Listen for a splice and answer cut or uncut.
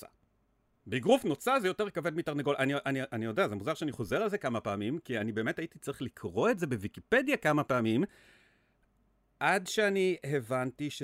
uncut